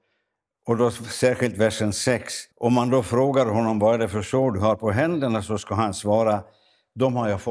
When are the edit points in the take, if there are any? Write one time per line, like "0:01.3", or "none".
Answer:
0:02.5